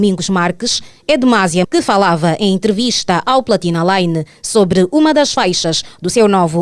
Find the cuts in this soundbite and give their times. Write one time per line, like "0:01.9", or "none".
0:01.6

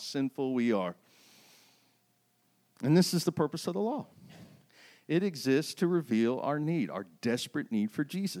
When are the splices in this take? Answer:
none

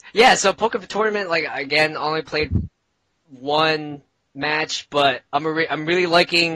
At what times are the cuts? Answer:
none

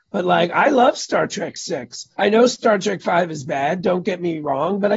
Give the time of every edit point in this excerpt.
0:02.1

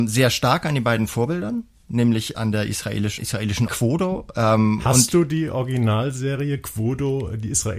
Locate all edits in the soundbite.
0:02.3
0:03.2
0:03.7

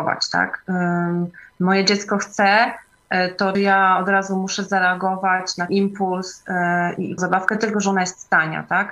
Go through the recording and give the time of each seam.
0:03.5
0:05.7
0:07.2
0:07.7

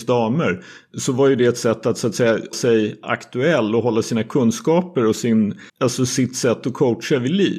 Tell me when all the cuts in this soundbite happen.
0:02.5
0:05.7

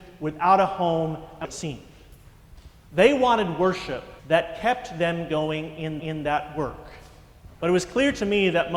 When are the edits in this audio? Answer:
0:01.4
0:04.2
0:06.0
0:07.5

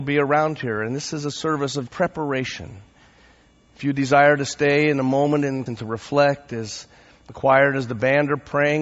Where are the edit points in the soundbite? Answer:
0:01.9
0:05.7

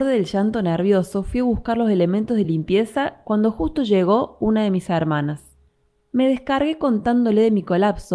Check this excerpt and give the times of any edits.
none

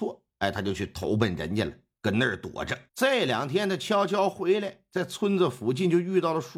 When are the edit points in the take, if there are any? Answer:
0:02.9

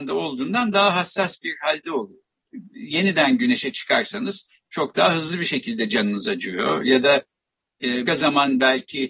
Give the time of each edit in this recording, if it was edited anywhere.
0:08.1

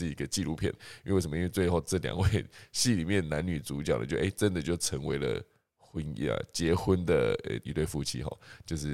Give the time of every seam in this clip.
none

